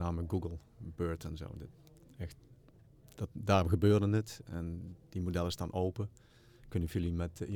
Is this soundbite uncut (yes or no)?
yes